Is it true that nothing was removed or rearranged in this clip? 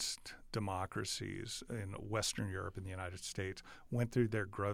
yes; 0 cuts

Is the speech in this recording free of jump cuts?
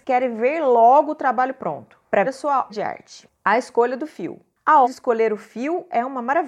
no; 3 cuts; at 2.2 s, 2.7 s, 4.8 s

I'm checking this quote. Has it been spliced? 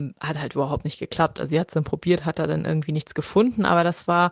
no; 0 cuts

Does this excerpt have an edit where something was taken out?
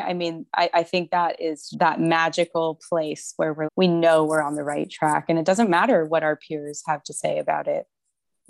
yes; 2 cuts; at 1.7 s, 3.6 s

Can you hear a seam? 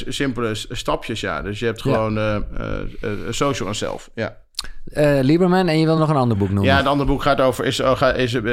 no; 0 cuts

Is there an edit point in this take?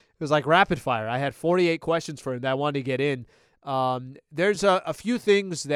no; 0 cuts

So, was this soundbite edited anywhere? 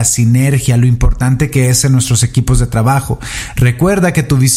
no; 0 cuts

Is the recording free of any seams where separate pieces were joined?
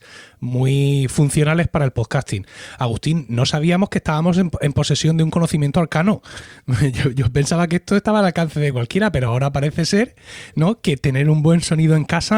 yes; 0 cuts

